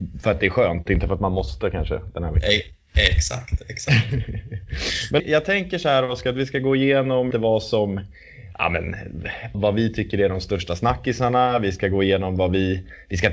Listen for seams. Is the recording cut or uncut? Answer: cut